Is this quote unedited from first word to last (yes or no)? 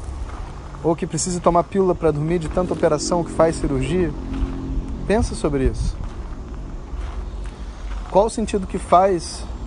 yes